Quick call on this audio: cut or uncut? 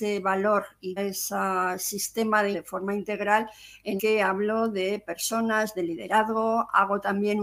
cut